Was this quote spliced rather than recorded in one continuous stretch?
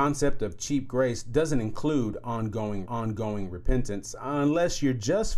yes; 1 cut; at 2.9 s

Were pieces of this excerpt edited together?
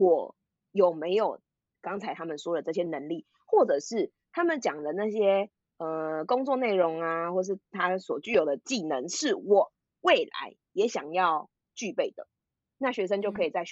no; 0 cuts

